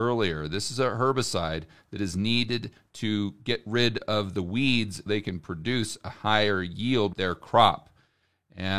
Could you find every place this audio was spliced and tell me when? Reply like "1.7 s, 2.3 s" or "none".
5.1 s, 7.1 s